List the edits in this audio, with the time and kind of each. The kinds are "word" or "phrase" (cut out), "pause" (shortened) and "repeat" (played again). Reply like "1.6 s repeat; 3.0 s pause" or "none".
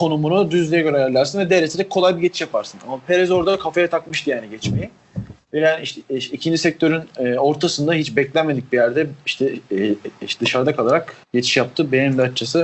5.4 s pause; 11.2 s pause

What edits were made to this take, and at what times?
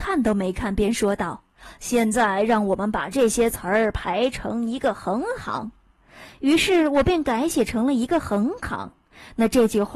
none

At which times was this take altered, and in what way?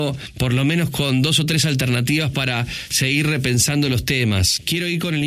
none

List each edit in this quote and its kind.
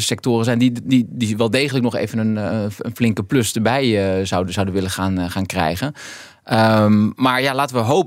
none

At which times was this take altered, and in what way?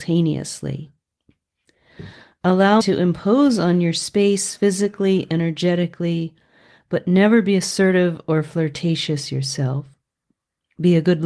2.8 s word

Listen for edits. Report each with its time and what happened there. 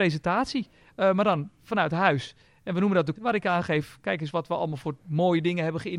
3.2 s word; 4.3 s word

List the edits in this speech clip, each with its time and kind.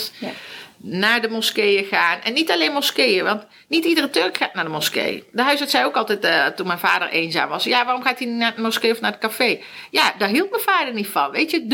none

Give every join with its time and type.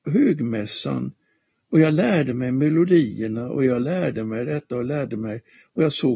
none

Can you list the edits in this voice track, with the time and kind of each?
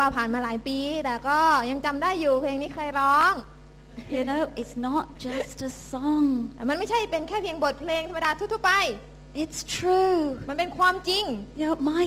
none

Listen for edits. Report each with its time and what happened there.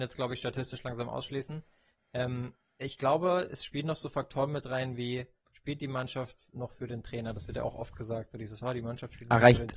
none

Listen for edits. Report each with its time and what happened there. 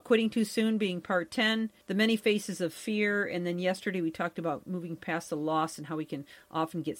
1.8 s pause

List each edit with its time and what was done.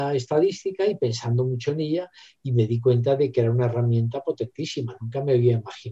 none

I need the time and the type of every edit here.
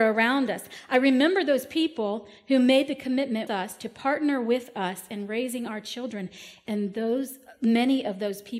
3.5 s word

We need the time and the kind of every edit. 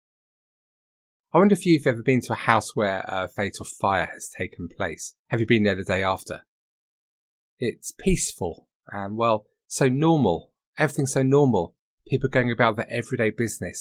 5.2 s pause

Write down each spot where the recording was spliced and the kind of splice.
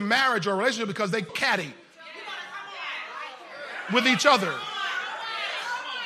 1.3 s word

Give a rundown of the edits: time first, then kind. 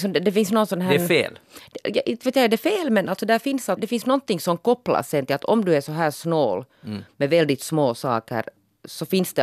3.8 s word

